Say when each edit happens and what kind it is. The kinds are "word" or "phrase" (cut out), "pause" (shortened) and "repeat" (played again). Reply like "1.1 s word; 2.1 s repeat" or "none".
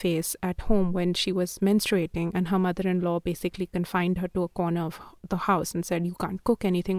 none